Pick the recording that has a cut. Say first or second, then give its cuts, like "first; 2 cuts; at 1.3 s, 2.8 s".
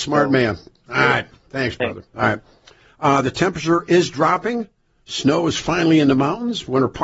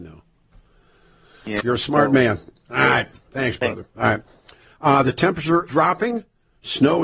second; 2 cuts; at 1.6 s, 5.7 s